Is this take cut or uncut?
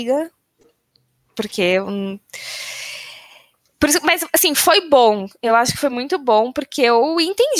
uncut